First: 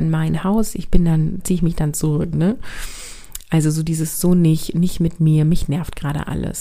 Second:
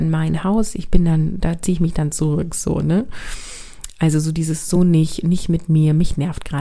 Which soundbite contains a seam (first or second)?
first